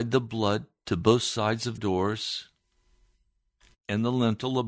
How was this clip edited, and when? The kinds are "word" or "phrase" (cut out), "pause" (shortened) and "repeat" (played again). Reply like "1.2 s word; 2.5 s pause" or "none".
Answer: 1.8 s word